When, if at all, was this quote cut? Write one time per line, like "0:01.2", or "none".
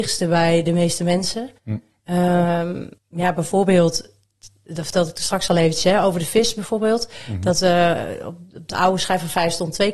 0:01.6
0:03.0